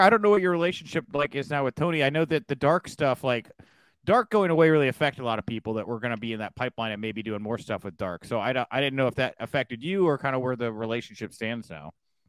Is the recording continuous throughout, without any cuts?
yes; 0 cuts

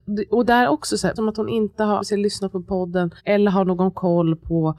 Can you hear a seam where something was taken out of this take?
yes; 3 cuts; at 1.2 s, 2.0 s, 3.2 s

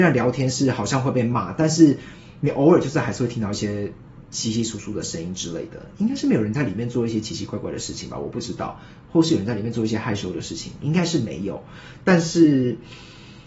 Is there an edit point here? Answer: yes; 1 cut; at 4.2 s

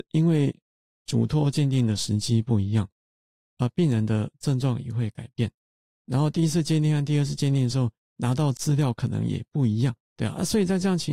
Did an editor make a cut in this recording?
no; 0 cuts

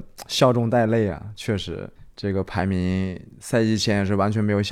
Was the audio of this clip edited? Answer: yes; 1 cut; at 2.0 s

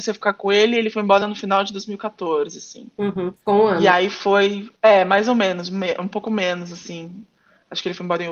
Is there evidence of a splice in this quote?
yes; 1 cut; at 4.8 s

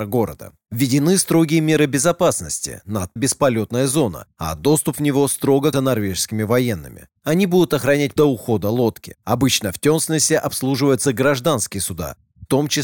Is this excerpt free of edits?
no; 3 cuts; at 3.2 s, 5.7 s, 8.2 s

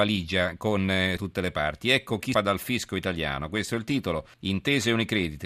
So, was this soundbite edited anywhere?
yes; 3 cuts; at 1.2 s, 2.3 s, 4.3 s

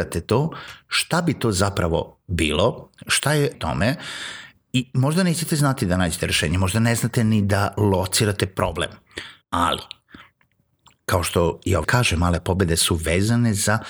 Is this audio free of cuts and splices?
no; 3 cuts; at 3.5 s, 9.4 s, 11.8 s

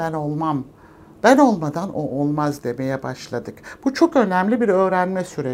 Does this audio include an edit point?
no; 0 cuts

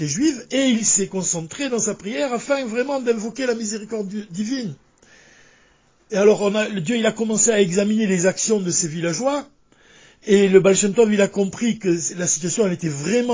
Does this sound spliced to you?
no; 0 cuts

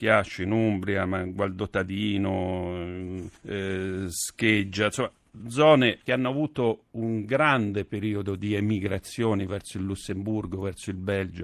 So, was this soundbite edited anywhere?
yes; 2 cuts; at 3.4 s, 6.1 s

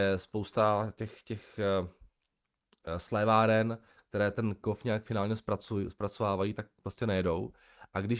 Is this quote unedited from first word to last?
yes; 0 cuts

